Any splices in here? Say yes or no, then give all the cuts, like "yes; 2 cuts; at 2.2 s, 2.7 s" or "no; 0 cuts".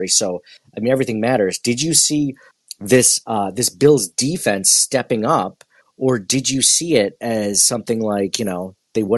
no; 0 cuts